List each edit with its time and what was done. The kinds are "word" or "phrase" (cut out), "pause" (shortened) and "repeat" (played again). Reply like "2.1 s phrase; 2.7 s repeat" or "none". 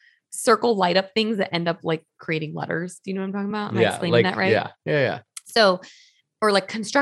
none